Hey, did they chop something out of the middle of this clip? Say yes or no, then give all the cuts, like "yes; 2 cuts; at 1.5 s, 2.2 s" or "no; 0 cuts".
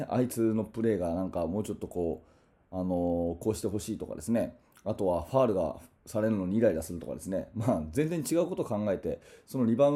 no; 0 cuts